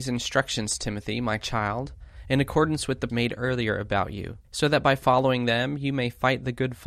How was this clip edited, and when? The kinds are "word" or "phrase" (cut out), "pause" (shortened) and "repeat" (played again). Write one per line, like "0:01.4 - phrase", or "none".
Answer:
0:03.1 - word
0:04.4 - pause